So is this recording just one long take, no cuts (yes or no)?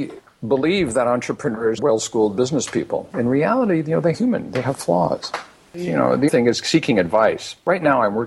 no